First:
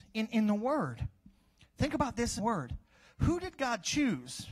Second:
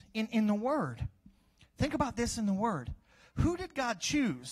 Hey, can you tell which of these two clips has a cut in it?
first; 1 cut; at 2.4 s

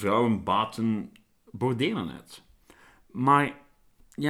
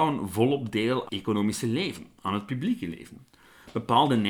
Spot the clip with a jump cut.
second; 1 cut; at 1.1 s

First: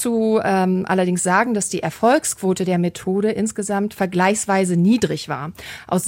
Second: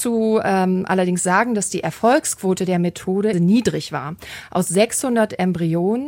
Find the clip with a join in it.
second; 1 cut; at 3.3 s

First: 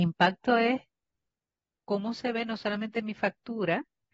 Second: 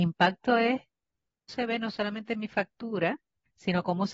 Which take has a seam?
second; 1 cut; at 1.5 s

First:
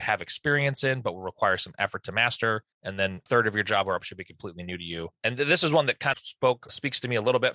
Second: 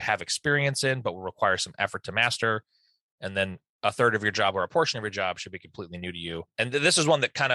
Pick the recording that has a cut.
first; 4 cuts; at 2.7 s, 3.3 s, 4.0 s, 6.1 s

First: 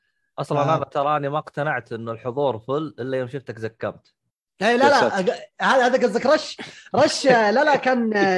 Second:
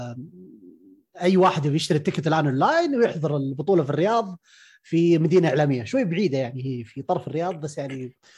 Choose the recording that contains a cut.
first; 1 cut; at 4.3 s

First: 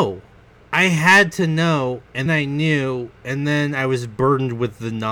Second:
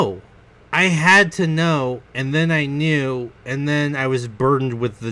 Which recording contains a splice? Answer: first; 1 cut; at 2.3 s

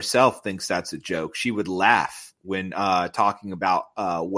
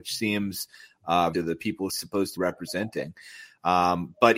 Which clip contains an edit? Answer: second; 3 cuts; at 1.3 s, 1.9 s, 2.4 s

